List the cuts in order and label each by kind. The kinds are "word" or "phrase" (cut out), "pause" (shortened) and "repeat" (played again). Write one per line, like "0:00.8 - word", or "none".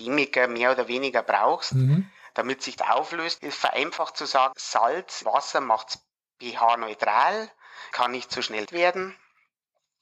0:02.8 - word
0:03.4 - word
0:04.5 - word
0:05.2 - word
0:07.9 - word
0:08.7 - word